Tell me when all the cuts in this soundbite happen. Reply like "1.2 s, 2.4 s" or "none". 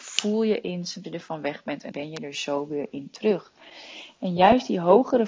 1.0 s, 1.9 s